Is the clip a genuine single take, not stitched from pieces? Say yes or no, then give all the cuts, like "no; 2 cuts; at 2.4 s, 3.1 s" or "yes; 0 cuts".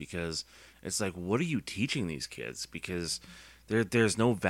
yes; 0 cuts